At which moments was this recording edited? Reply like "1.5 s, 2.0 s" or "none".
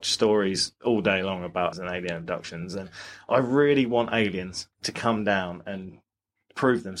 1.7 s, 4.7 s